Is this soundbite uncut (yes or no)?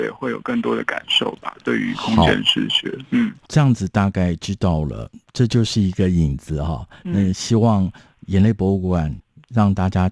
yes